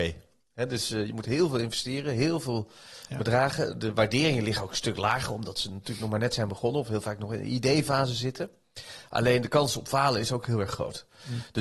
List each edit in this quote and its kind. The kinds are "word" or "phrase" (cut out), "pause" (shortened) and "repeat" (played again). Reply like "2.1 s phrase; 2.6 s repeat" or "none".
none